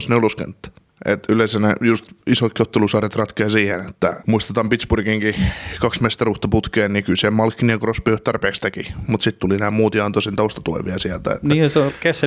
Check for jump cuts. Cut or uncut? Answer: uncut